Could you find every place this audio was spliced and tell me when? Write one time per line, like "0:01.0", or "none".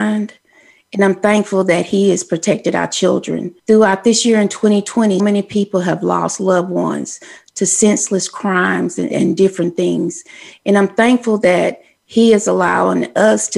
0:03.6
0:05.2
0:09.1